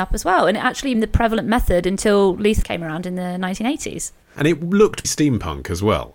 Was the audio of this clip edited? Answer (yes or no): yes